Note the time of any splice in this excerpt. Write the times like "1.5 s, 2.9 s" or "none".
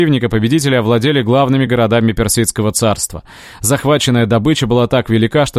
none